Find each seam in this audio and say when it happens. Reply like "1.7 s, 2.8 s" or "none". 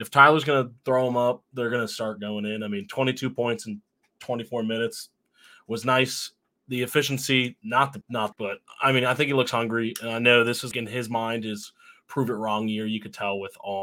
8.0 s, 8.3 s, 10.7 s